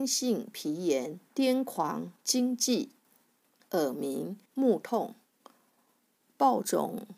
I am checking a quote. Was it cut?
yes; 3 cuts; at 1.3 s, 2.2 s, 4.5 s

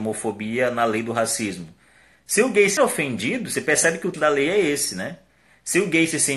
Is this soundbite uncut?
no; 2 cuts; at 2.8 s, 4.1 s

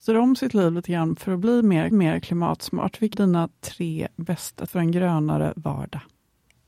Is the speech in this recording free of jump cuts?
no; 3 cuts; at 1.9 s, 3.1 s, 4.7 s

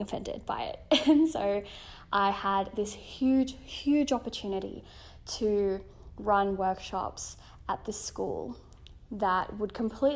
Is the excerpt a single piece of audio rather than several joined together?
yes; 0 cuts

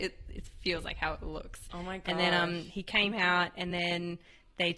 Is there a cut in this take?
no; 0 cuts

